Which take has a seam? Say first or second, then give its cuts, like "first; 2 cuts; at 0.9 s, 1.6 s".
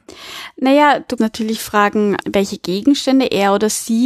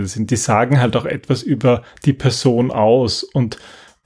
first; 2 cuts; at 1.2 s, 2.2 s